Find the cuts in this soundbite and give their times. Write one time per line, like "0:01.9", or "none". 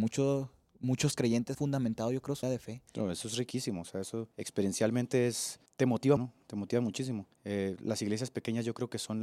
0:01.5
0:02.4
0:02.9
0:04.3
0:05.7
0:06.2
0:07.3